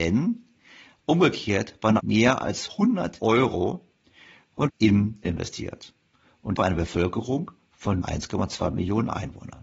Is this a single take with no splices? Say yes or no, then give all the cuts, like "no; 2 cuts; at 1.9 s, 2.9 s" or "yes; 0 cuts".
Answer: no; 6 cuts; at 2.0 s, 3.2 s, 4.7 s, 5.2 s, 6.6 s, 8.0 s